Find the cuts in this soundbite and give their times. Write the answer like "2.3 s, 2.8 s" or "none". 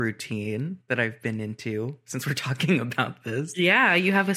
none